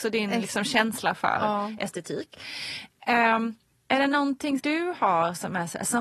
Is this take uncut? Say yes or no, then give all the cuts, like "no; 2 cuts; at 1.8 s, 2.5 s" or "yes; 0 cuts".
no; 2 cuts; at 3.7 s, 4.6 s